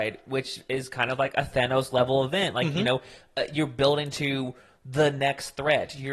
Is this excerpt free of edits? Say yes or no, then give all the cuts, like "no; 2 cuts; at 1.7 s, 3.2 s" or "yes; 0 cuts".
yes; 0 cuts